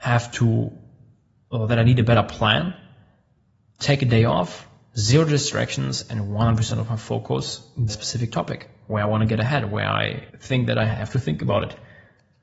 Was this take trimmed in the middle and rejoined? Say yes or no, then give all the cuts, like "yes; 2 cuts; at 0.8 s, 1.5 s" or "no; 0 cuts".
yes; 3 cuts; at 3.8 s, 7.9 s, 10.3 s